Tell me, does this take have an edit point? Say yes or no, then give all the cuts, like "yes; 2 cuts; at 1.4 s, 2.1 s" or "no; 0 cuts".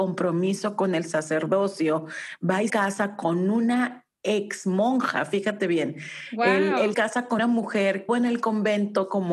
yes; 4 cuts; at 2.7 s, 6.9 s, 7.4 s, 8.1 s